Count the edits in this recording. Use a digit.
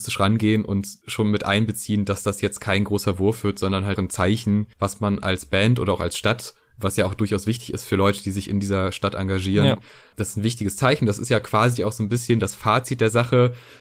2